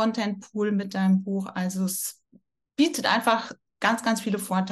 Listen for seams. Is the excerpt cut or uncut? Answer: uncut